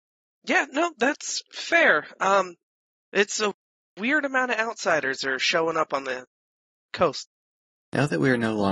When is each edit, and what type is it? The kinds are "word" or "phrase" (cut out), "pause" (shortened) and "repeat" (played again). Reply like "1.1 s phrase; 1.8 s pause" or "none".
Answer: none